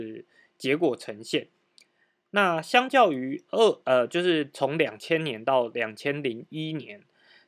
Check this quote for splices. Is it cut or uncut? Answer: uncut